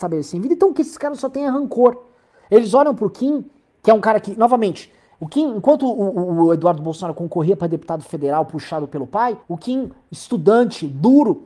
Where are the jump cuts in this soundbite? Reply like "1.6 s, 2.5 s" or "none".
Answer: 9.4 s